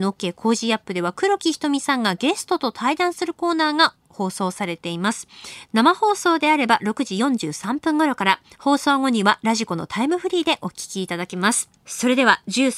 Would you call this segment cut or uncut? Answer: cut